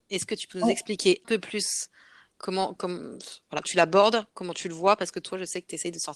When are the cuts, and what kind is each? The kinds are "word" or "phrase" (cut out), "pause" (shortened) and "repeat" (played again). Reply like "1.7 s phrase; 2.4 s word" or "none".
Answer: 1.2 s word; 2.8 s word; 3.6 s word